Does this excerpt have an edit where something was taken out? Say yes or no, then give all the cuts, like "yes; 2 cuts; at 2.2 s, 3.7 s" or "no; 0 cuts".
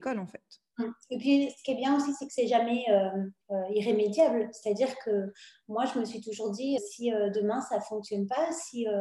yes; 2 cuts; at 3.4 s, 6.8 s